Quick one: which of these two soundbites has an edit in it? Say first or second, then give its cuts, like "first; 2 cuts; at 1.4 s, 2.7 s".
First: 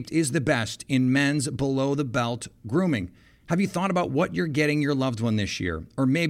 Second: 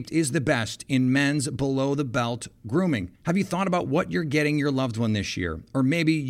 second; 1 cut; at 3.2 s